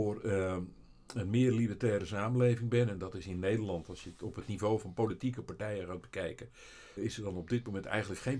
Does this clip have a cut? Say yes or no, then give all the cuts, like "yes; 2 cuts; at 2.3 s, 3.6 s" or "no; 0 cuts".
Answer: yes; 1 cut; at 7.0 s